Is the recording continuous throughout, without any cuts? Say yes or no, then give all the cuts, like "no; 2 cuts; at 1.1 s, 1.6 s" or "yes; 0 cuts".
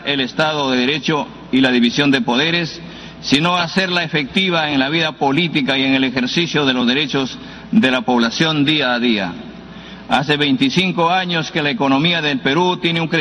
yes; 0 cuts